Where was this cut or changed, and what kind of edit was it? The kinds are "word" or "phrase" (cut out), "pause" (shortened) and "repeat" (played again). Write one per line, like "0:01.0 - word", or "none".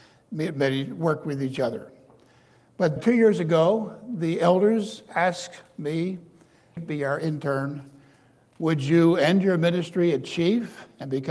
0:03.0 - word
0:06.8 - phrase